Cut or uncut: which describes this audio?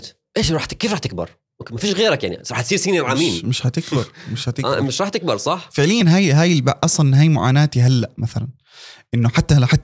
uncut